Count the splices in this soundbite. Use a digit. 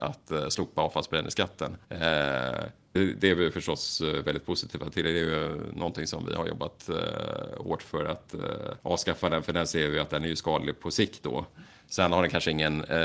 3